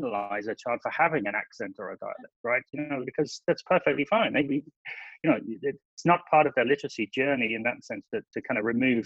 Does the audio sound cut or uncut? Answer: uncut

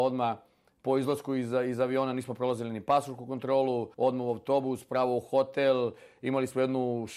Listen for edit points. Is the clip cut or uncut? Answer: cut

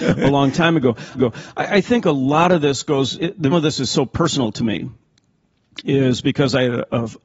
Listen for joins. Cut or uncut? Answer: cut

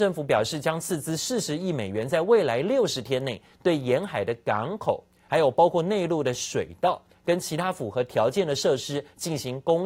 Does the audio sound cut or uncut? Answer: uncut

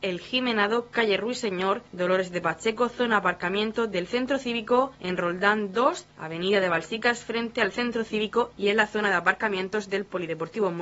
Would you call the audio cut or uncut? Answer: uncut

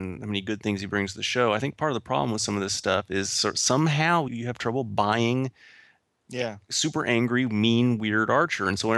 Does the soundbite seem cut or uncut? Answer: cut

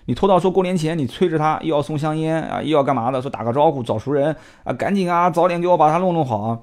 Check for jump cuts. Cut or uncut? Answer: uncut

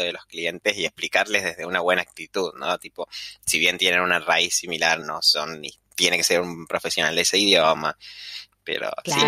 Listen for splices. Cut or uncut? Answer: cut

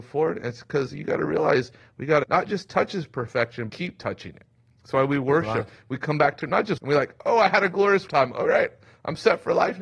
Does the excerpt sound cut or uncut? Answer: cut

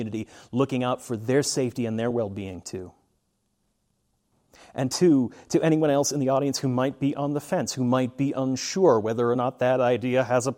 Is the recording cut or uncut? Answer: uncut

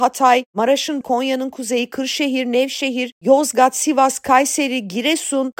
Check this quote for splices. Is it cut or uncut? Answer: cut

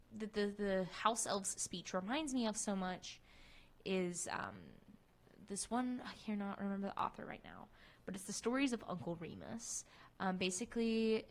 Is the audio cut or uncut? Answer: uncut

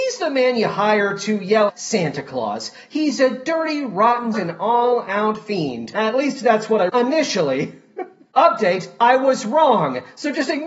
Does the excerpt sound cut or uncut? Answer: cut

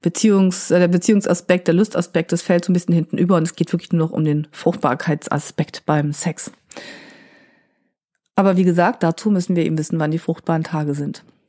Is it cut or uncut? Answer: uncut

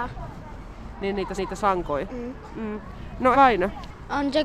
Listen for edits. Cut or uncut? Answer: cut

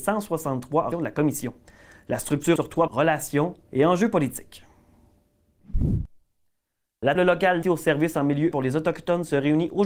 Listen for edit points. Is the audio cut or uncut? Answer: cut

